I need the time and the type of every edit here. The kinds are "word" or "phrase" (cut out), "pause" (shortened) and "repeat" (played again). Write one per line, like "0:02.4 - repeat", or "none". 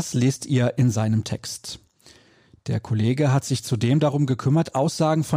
none